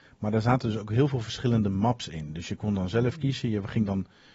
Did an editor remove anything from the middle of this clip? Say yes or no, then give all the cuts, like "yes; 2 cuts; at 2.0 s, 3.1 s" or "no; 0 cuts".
no; 0 cuts